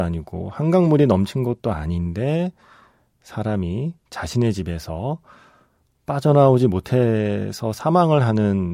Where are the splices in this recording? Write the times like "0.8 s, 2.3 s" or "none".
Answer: none